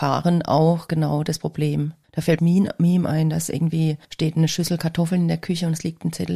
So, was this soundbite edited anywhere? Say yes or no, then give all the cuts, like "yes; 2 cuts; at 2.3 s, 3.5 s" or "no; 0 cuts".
yes; 1 cut; at 2.4 s